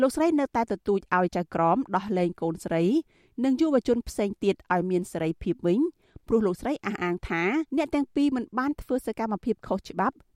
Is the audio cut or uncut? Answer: cut